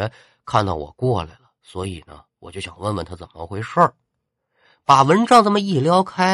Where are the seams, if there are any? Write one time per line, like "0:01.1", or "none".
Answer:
none